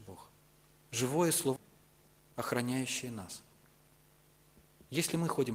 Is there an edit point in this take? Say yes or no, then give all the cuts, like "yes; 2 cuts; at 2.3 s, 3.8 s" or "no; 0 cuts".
yes; 1 cut; at 1.6 s